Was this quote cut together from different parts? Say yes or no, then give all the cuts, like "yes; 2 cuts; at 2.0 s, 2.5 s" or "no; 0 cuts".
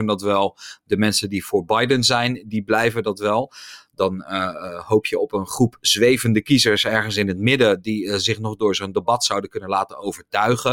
no; 0 cuts